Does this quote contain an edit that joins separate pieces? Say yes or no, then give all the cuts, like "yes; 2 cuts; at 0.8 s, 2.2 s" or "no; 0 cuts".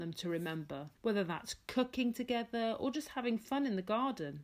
yes; 1 cut; at 1.0 s